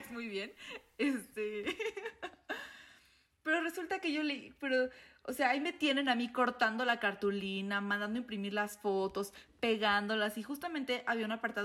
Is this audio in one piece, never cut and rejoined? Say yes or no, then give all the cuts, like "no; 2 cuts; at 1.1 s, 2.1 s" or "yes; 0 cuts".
yes; 0 cuts